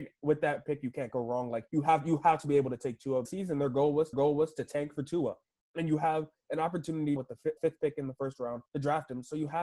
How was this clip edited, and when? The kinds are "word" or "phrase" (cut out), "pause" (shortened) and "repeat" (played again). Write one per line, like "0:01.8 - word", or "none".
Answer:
0:01.7 - pause
0:03.3 - phrase
0:04.1 - repeat
0:07.2 - word
0:07.6 - word
0:08.7 - pause